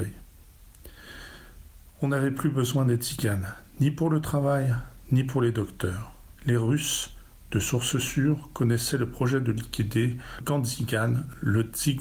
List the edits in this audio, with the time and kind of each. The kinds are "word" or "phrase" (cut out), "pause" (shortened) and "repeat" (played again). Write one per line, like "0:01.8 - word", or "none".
0:06.4 - pause
0:10.4 - word